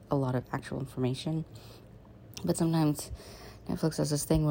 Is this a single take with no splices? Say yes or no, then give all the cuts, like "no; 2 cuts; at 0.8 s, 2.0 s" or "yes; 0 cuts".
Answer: no; 1 cut; at 2.5 s